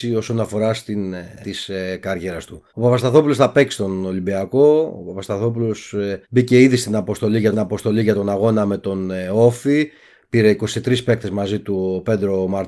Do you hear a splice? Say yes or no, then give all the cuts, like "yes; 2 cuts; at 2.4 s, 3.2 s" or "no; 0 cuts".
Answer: yes; 4 cuts; at 1.4 s, 2.7 s, 6.2 s, 7.5 s